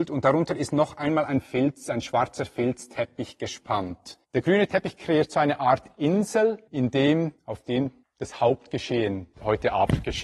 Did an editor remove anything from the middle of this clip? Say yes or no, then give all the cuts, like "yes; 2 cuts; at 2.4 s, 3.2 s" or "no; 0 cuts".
yes; 5 cuts; at 4.2 s, 6.7 s, 7.4 s, 8.0 s, 9.3 s